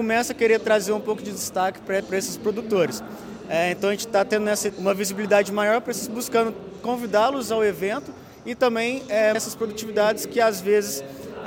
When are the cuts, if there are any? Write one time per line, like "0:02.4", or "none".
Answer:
0:02.0
0:04.7
0:06.1
0:09.3